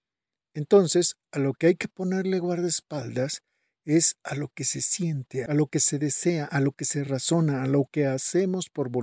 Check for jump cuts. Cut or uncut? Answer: uncut